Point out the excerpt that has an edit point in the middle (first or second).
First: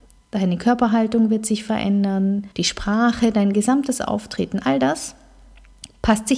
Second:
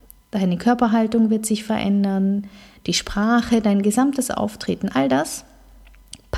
first